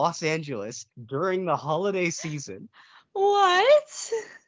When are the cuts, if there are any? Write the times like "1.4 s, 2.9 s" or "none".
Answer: 0.9 s